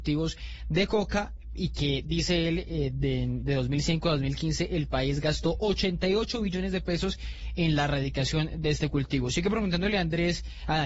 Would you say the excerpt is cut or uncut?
uncut